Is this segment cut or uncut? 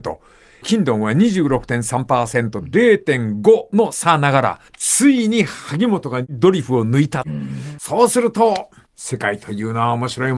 cut